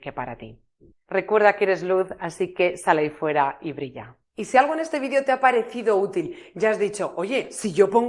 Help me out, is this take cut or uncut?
cut